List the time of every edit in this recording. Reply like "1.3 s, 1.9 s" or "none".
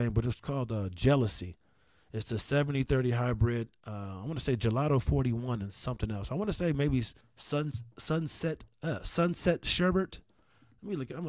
7.2 s